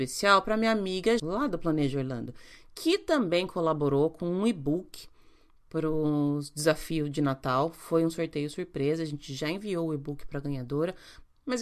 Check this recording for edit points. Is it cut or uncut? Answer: cut